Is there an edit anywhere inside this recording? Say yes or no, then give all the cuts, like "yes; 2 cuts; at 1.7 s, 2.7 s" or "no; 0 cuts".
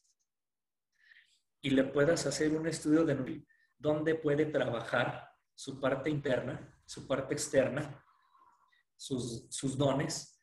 no; 0 cuts